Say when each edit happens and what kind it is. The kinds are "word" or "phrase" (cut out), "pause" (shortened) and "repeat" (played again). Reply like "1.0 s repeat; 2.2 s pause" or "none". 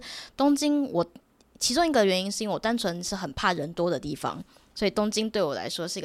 none